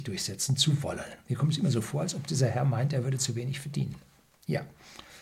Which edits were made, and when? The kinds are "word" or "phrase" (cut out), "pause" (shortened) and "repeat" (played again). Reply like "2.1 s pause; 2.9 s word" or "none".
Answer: none

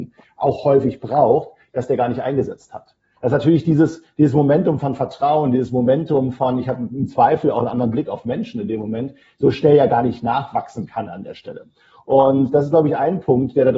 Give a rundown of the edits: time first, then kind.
none

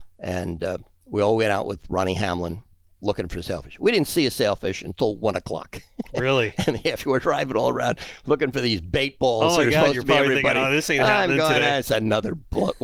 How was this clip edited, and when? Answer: none

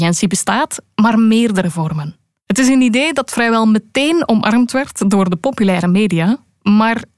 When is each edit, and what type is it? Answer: none

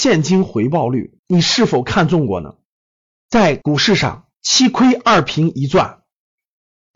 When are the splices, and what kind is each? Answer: 1.2 s pause

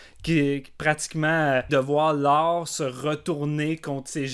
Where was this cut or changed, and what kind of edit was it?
1.7 s word

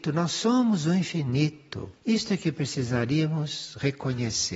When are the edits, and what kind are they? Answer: 2.0 s pause

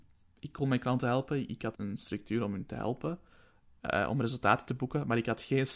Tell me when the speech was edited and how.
1.7 s word

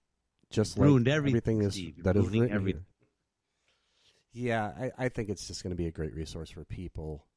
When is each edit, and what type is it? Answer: 2.9 s pause

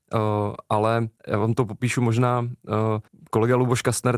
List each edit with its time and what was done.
1.2 s pause; 3.1 s pause

